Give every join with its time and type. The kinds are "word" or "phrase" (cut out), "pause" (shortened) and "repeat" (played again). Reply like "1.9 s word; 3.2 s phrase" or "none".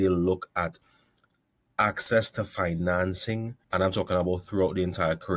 3.6 s pause